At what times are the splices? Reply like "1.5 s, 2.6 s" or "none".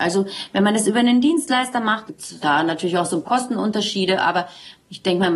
2.1 s, 2.4 s, 3.2 s

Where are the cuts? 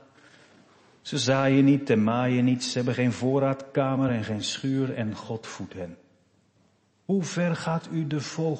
none

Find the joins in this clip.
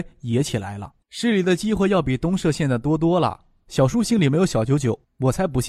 1.0 s

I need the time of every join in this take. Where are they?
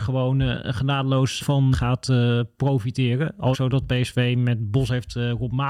1.4 s, 1.7 s, 3.5 s

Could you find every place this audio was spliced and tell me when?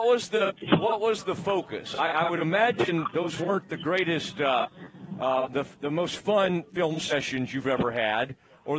none

